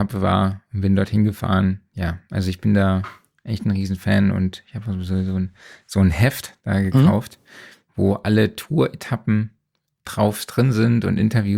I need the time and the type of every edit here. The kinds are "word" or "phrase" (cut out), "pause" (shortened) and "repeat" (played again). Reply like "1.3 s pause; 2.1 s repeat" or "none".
none

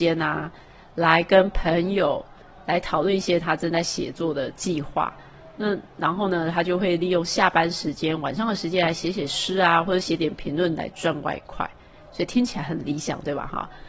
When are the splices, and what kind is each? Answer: none

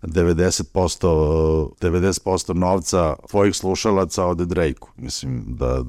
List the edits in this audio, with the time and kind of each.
1.7 s pause; 3.3 s word

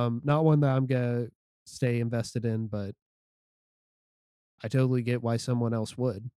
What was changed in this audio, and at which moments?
none

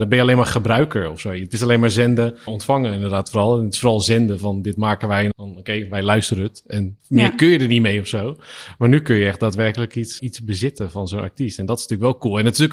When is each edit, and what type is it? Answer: 2.5 s word; 5.3 s word; 7.0 s pause; 10.2 s word

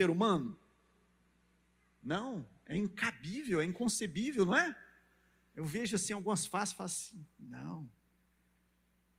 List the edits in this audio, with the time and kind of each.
none

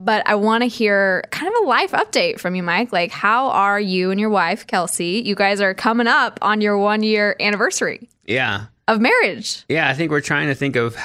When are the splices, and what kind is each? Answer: 1.3 s word

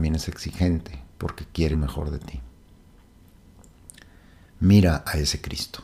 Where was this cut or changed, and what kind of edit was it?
1.1 s pause; 1.7 s word

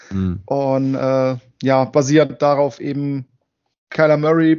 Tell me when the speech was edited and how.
none

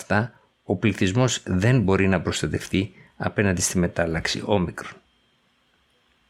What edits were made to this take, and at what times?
none

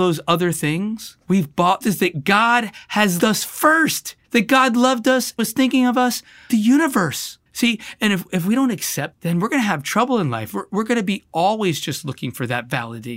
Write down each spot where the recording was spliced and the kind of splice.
1.2 s pause; 1.8 s phrase; 3.2 s word; 4.2 s pause; 5.4 s word; 6.5 s phrase; 7.5 s pause; 9.1 s word

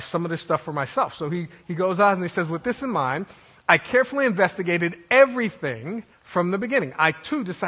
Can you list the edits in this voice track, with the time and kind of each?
6.1 s pause

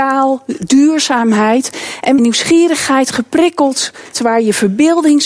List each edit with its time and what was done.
2.2 s phrase; 4.1 s word

